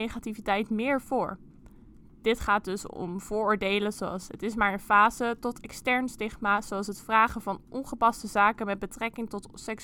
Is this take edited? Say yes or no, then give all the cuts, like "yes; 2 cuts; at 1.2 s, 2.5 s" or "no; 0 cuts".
no; 0 cuts